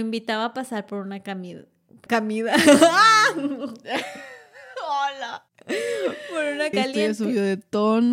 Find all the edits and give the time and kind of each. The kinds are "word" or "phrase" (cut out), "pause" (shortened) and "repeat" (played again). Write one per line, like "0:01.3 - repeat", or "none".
0:02.1 - word
0:06.7 - phrase